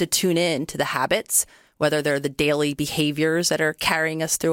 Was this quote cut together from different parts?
no; 0 cuts

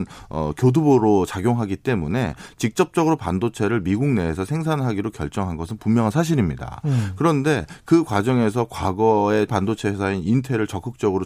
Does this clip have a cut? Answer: yes; 1 cut; at 9.5 s

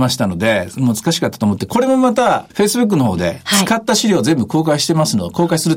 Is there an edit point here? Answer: yes; 1 cut; at 2.5 s

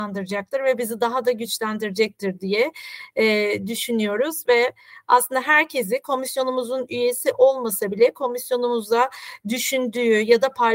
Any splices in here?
no; 0 cuts

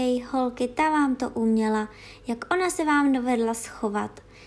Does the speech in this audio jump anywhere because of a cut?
no; 0 cuts

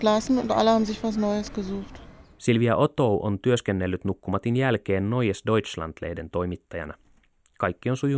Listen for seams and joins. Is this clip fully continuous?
yes; 0 cuts

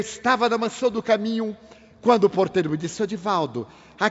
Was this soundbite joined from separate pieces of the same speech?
no; 0 cuts

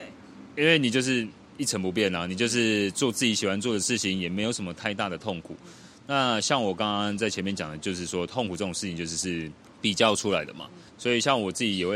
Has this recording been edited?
yes; 1 cut; at 10.9 s

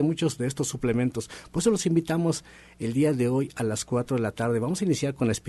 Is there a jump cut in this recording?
no; 0 cuts

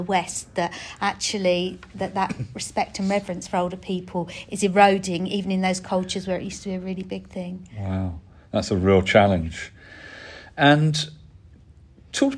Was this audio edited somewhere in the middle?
no; 0 cuts

